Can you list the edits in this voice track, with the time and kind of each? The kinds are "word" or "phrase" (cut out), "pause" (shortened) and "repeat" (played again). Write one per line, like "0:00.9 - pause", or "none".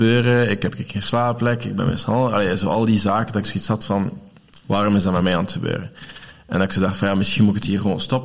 none